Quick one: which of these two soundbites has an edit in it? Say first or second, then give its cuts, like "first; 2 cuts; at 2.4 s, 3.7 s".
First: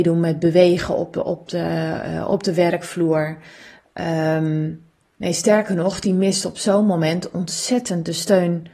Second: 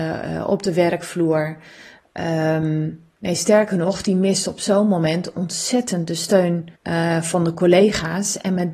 second; 2 cuts; at 3.1 s, 6.7 s